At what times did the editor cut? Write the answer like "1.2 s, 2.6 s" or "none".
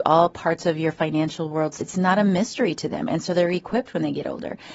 1.8 s